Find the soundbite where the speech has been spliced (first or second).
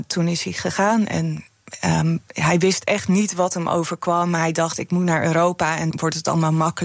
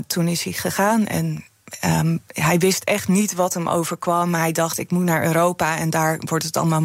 first